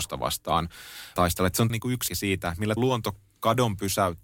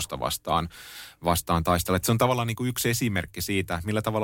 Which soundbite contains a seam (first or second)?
first